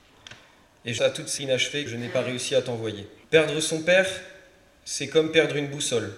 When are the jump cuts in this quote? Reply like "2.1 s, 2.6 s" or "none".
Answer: 1.0 s, 1.4 s, 1.9 s, 3.2 s